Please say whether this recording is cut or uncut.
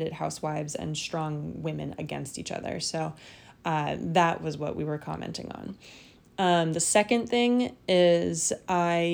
uncut